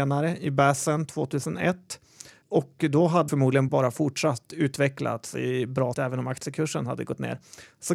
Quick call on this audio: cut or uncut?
cut